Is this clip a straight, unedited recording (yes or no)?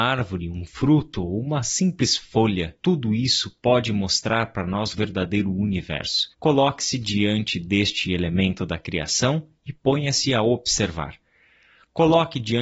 no